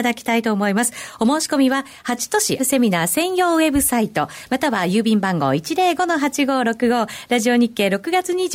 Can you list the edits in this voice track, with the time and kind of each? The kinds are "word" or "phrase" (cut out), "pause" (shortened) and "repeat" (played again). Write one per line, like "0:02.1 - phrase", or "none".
0:02.6 - word